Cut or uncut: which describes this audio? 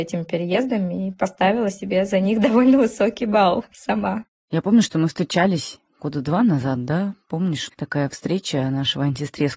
cut